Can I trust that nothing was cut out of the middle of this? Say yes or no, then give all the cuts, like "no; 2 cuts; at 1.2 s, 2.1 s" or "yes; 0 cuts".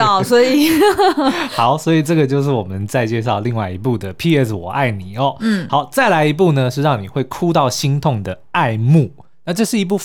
yes; 0 cuts